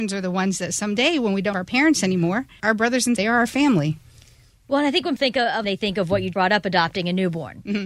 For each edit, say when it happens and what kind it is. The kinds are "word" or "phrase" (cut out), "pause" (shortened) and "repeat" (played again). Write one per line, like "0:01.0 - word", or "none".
0:01.5 - word
0:02.6 - word
0:03.2 - word
0:05.2 - word
0:05.6 - word
0:06.3 - word